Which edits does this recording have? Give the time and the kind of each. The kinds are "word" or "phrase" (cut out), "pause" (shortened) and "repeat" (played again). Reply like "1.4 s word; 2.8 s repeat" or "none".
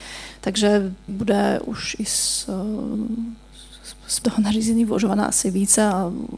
1.1 s word; 4.2 s word